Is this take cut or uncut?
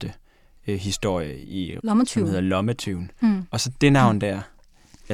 cut